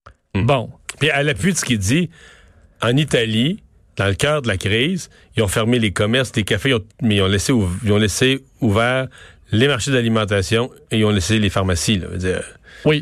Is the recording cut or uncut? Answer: cut